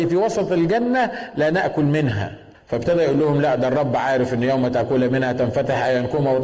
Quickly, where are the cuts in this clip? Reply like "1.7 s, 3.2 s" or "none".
2.5 s